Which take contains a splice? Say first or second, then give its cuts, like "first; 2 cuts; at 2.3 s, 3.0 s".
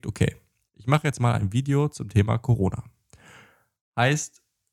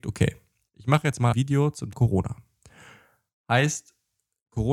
second; 2 cuts; at 1.3 s, 1.9 s